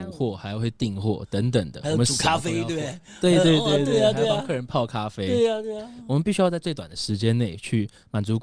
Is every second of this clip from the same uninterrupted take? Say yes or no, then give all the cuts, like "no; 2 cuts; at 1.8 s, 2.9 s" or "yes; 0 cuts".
yes; 0 cuts